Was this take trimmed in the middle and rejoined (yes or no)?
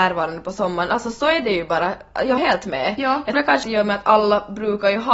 yes